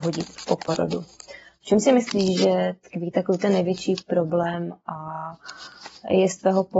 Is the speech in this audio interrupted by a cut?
no; 0 cuts

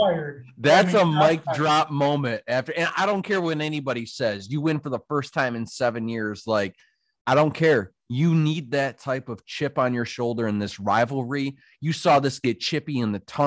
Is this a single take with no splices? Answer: yes; 0 cuts

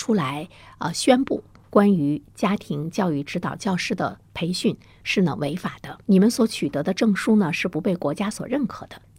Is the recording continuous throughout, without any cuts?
yes; 0 cuts

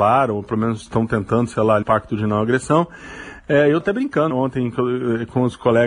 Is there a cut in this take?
yes; 3 cuts; at 1.8 s, 3.8 s, 4.3 s

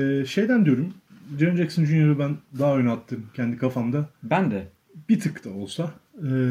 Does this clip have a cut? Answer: no; 0 cuts

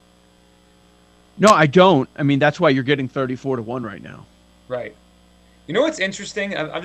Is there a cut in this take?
no; 0 cuts

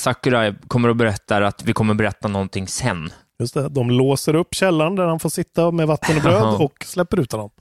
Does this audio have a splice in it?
no; 0 cuts

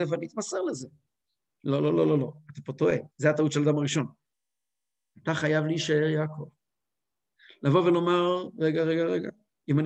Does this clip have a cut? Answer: yes; 1 cut; at 3.1 s

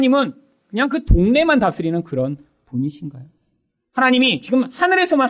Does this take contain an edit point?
no; 0 cuts

